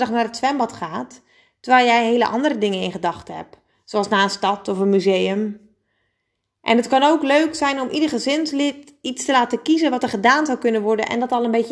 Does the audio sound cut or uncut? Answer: uncut